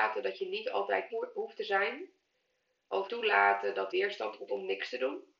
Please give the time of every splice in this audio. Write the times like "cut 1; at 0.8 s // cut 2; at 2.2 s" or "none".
cut 1; at 1.1 s // cut 2; at 3.1 s // cut 3; at 3.9 s // cut 4; at 4.5 s